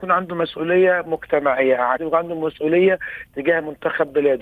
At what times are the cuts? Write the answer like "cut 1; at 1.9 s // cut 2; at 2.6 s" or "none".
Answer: cut 1; at 2.0 s